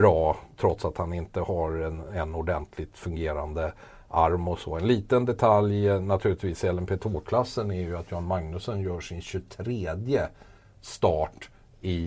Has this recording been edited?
no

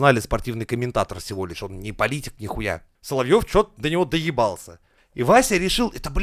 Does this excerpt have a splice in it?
no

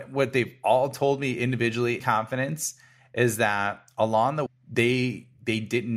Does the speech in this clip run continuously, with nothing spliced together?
no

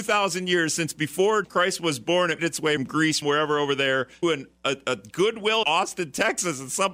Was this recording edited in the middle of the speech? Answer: yes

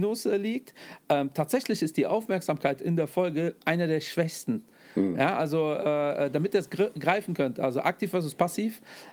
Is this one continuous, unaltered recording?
yes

